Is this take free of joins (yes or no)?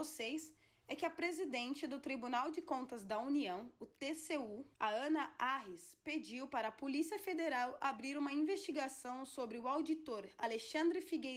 no